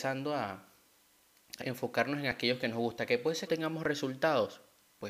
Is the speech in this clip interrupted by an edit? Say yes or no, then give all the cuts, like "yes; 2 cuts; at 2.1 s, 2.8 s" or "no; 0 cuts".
yes; 2 cuts; at 1.6 s, 3.5 s